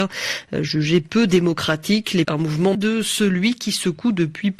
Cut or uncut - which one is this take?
cut